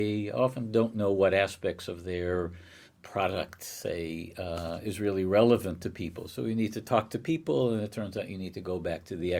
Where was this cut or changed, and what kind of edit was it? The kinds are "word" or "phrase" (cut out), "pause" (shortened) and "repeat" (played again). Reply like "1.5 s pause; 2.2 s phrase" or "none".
2.9 s pause

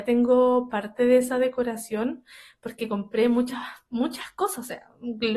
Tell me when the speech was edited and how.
none

